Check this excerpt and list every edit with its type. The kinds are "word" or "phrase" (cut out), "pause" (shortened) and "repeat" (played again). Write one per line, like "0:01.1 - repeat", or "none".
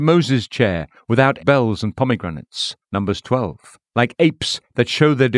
0:01.4 - word
0:02.8 - pause
0:03.9 - pause